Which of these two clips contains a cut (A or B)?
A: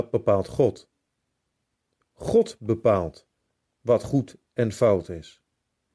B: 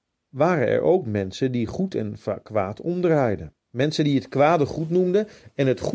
B